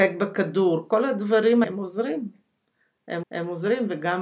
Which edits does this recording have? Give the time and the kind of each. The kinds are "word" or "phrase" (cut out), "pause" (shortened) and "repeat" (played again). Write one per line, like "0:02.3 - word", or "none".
0:01.6 - word
0:03.2 - repeat

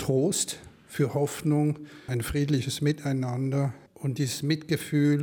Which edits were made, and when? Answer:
0:02.1 - word
0:03.9 - pause

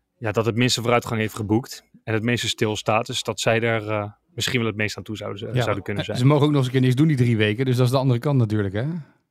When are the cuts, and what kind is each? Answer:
0:04.2 - pause

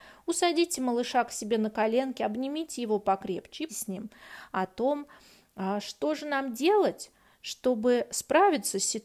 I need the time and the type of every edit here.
0:03.7 - word

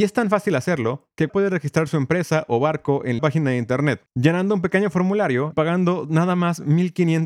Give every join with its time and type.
0:01.3 - word
0:03.2 - phrase
0:04.1 - pause
0:05.5 - word

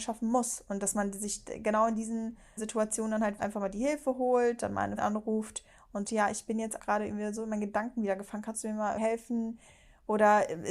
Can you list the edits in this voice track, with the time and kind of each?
0:02.6 - word
0:03.4 - word
0:05.0 - word
0:06.0 - word
0:06.8 - word
0:09.0 - word

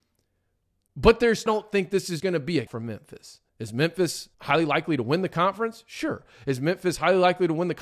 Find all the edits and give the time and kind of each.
0:01.5 - phrase
0:02.2 - word
0:02.7 - word
0:03.5 - pause
0:04.3 - pause

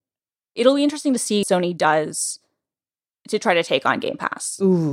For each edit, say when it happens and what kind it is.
0:01.4 - word

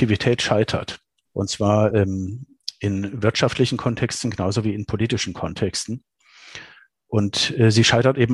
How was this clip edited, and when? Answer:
none

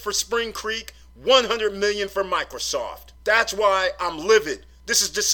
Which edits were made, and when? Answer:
0:03.2 - pause

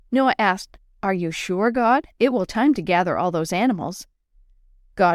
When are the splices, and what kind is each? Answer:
0:02.1 - pause
0:02.5 - phrase

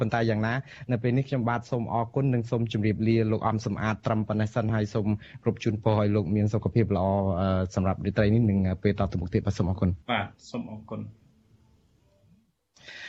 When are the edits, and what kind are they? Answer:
0:10.0 - pause

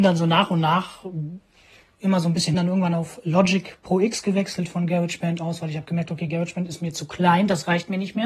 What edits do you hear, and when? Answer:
0:02.5 - phrase

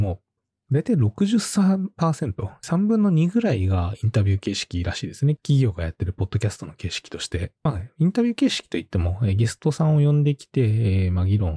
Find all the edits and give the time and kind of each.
0:07.6 - pause

